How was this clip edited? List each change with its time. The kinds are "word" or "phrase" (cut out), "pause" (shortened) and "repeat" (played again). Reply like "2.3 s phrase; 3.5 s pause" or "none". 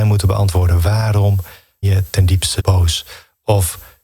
1.8 s word; 2.6 s word